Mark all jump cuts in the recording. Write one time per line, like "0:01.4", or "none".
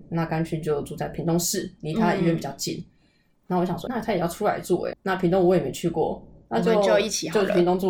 0:03.9
0:04.9